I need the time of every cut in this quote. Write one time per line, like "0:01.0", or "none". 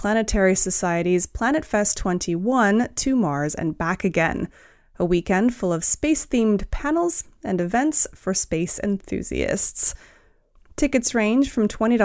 none